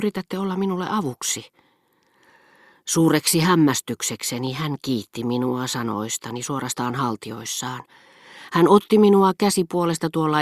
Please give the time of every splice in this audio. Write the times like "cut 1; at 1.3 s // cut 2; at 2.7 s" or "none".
none

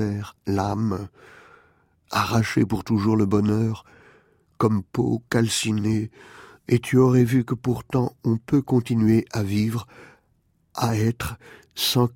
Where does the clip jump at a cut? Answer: none

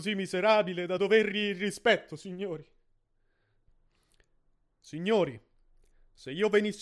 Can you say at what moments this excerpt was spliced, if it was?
none

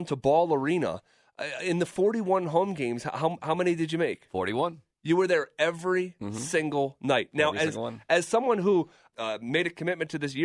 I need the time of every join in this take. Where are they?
cut 1; at 9.1 s

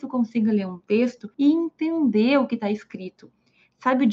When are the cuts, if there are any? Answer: cut 1; at 1.3 s

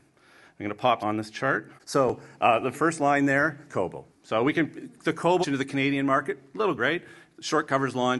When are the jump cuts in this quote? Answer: cut 1; at 1.0 s // cut 2; at 1.8 s // cut 3; at 2.7 s // cut 4; at 3.7 s // cut 5; at 4.1 s // cut 6; at 5.4 s // cut 7; at 6.8 s

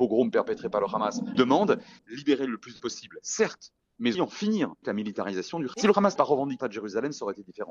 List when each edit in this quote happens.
cut 1; at 1.3 s // cut 2; at 2.0 s // cut 3; at 2.8 s // cut 4; at 4.1 s // cut 5; at 4.8 s // cut 6; at 5.7 s // cut 7; at 6.2 s // cut 8; at 6.6 s

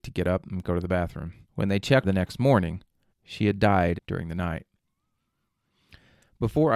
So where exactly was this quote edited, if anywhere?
cut 1; at 1.4 s // cut 2; at 2.0 s // cut 3; at 3.1 s // cut 4; at 4.0 s

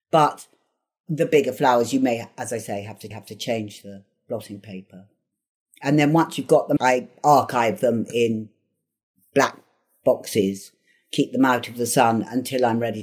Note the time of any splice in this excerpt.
cut 1; at 3.1 s // cut 2; at 6.8 s

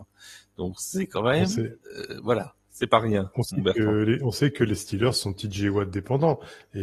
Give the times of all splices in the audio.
none

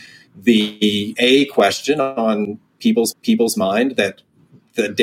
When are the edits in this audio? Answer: cut 1; at 1.2 s // cut 2; at 3.1 s

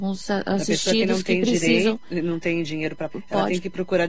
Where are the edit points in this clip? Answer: cut 1; at 3.1 s

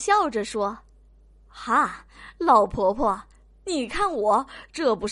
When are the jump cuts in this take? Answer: none

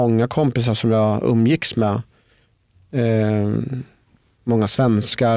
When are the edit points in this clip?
none

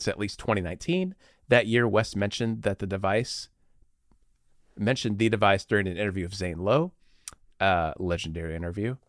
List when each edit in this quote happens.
none

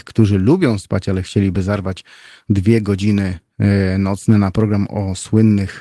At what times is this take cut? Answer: none

